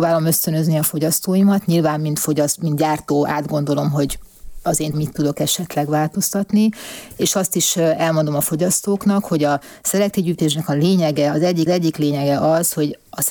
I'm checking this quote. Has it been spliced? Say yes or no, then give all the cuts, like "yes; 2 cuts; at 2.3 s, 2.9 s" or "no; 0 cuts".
yes; 2 cuts; at 4.9 s, 11.7 s